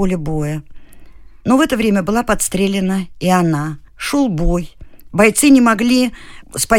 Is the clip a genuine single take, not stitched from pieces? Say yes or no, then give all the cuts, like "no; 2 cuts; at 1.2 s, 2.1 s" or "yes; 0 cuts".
no; 1 cut; at 3.9 s